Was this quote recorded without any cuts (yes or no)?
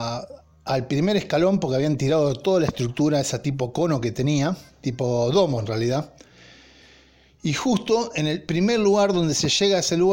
yes